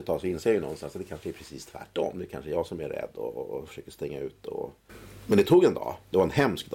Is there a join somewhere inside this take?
no; 0 cuts

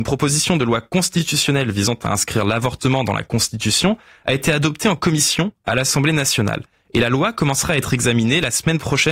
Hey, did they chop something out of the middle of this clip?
no; 0 cuts

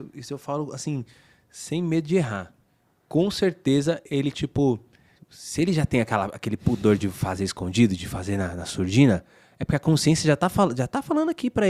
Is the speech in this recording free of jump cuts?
no; 1 cut; at 5.2 s

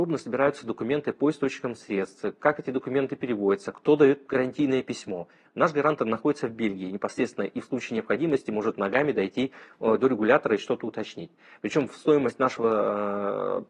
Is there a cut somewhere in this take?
no; 0 cuts

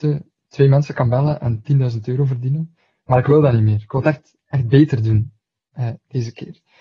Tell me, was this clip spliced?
no; 0 cuts

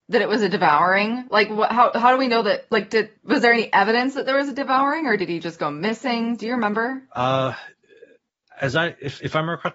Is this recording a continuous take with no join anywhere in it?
no; 2 cuts; at 3.1 s, 7.1 s

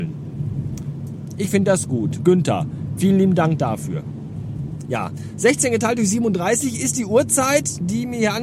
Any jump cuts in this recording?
no; 0 cuts

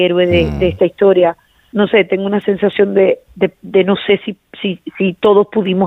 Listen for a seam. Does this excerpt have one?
no; 0 cuts

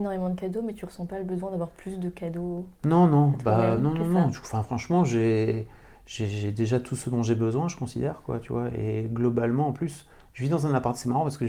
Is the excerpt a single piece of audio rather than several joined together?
yes; 0 cuts

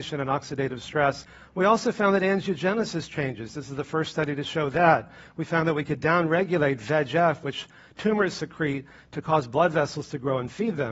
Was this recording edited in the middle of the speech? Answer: no; 0 cuts

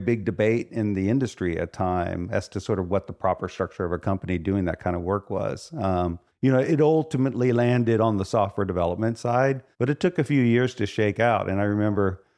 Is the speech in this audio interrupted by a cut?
yes; 3 cuts; at 1.7 s, 6.3 s, 9.7 s

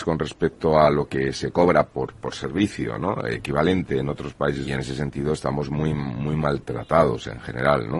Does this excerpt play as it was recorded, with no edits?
no; 1 cut; at 4.6 s

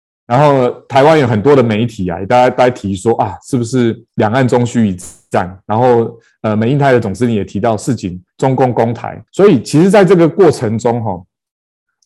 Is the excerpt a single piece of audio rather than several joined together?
no; 2 cuts; at 4.1 s, 9.3 s

